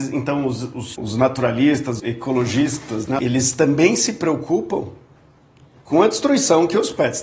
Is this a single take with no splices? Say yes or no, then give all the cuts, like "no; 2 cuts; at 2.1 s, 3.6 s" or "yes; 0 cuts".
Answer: no; 1 cut; at 2.0 s